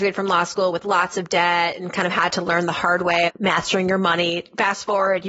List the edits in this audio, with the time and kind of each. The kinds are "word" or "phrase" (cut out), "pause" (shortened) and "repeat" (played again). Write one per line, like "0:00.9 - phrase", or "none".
0:03.3 - word